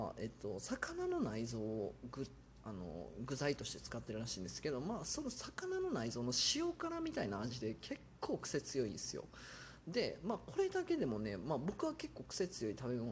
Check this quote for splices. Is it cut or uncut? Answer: uncut